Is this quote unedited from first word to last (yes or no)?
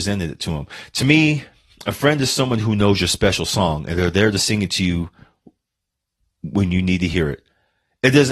yes